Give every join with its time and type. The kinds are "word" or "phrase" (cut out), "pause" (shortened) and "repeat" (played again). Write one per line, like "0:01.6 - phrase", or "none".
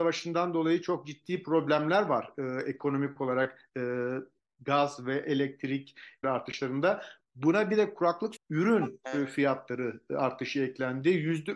0:06.2 - phrase
0:08.4 - phrase